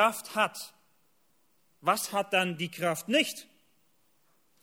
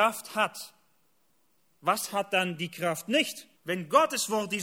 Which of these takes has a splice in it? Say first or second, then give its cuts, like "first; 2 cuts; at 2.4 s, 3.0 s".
second; 1 cut; at 3.5 s